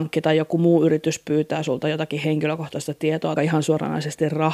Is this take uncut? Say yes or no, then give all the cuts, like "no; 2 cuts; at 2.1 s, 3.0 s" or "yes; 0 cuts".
no; 1 cut; at 3.4 s